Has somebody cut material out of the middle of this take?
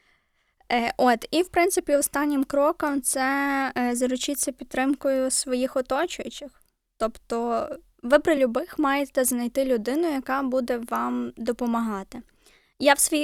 no; 0 cuts

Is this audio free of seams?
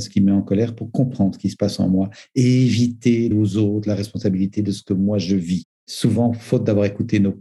no; 1 cut; at 3.3 s

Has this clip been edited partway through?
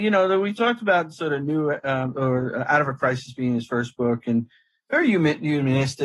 no; 0 cuts

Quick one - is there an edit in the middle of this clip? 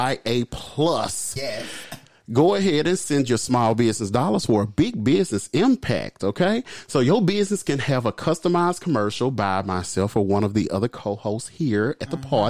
yes; 1 cut; at 1.4 s

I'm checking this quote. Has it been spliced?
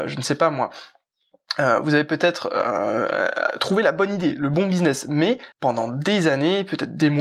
yes; 1 cut; at 5.5 s

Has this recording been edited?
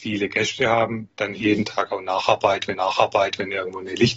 yes; 1 cut; at 2.7 s

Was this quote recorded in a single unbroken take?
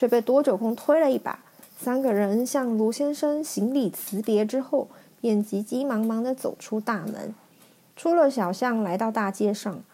yes; 0 cuts

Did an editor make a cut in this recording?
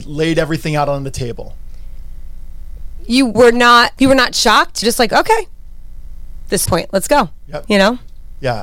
yes; 4 cuts; at 3.3 s, 4.0 s, 4.8 s, 6.7 s

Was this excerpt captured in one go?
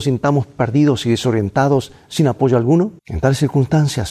no; 1 cut; at 3.0 s

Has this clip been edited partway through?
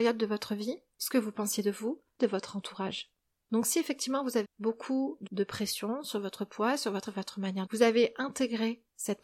yes; 6 cuts; at 0.9 s, 2.2 s, 4.4 s, 5.3 s, 7.1 s, 7.7 s

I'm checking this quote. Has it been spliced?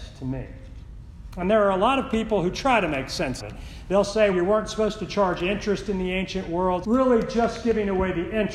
yes; 3 cuts; at 3.4 s, 4.3 s, 6.8 s

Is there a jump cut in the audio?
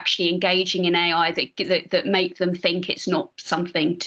no; 0 cuts

